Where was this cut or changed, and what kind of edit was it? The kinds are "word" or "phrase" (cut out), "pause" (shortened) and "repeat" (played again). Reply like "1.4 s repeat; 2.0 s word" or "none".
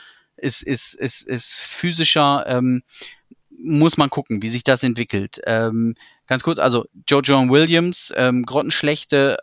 none